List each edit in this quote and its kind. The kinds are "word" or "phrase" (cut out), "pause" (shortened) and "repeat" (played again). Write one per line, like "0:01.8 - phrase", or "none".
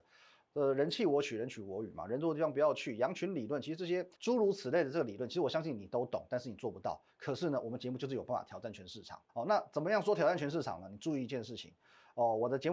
0:04.1 - pause
0:09.3 - pause